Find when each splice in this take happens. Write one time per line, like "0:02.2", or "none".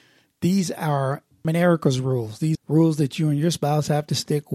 0:01.4
0:02.5